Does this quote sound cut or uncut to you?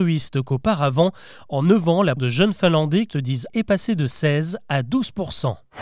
cut